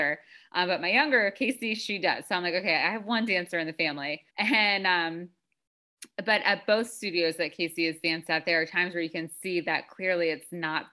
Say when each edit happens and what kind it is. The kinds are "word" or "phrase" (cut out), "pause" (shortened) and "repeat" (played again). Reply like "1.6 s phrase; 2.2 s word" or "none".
4.3 s pause